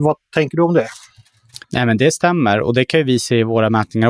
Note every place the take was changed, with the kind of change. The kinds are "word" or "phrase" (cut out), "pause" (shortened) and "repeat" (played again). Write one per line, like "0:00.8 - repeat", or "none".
0:01.6 - pause